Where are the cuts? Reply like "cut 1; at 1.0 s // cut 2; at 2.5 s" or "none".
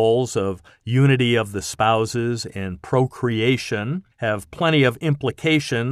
cut 1; at 4.1 s